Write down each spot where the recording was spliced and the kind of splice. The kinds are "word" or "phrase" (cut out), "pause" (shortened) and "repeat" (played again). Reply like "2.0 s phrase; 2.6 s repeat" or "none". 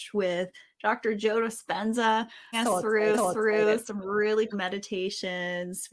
2.5 s word; 3.1 s repeat; 4.5 s word